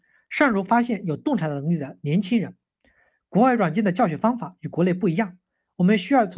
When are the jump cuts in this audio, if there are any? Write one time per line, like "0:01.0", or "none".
none